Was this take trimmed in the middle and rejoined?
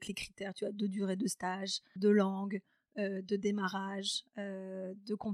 yes; 1 cut; at 2.0 s

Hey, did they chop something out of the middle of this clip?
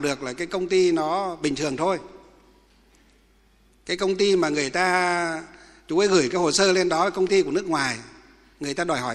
no; 0 cuts

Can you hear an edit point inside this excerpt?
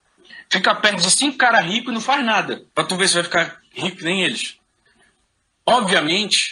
yes; 1 cut; at 2.7 s

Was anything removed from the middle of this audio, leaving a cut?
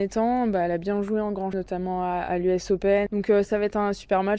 yes; 1 cut; at 1.5 s

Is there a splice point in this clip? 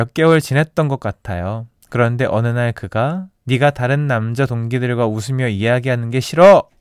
yes; 1 cut; at 3.4 s

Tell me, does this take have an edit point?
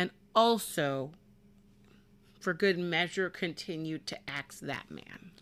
no; 0 cuts

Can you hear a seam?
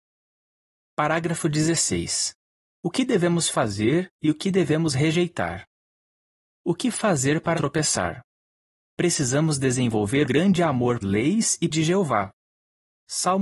yes; 4 cuts; at 7.6 s, 10.2 s, 11.0 s, 11.7 s

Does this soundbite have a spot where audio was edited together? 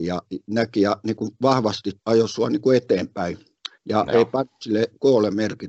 yes; 2 cuts; at 2.0 s, 3.8 s

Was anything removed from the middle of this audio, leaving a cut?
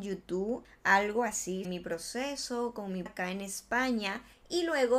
yes; 2 cuts; at 1.6 s, 3.1 s

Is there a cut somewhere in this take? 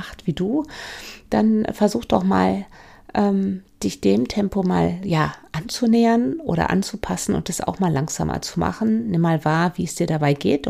no; 0 cuts

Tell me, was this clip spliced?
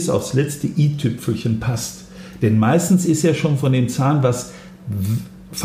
no; 0 cuts

